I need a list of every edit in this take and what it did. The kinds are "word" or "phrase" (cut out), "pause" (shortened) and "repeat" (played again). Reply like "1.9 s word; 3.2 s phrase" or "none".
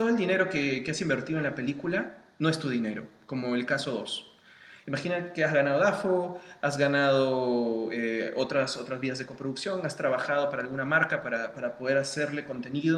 none